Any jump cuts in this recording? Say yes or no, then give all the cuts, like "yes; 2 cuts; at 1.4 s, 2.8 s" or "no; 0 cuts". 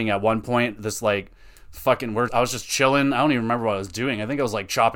yes; 1 cut; at 2.3 s